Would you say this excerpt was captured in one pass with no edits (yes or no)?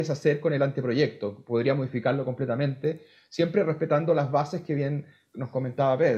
yes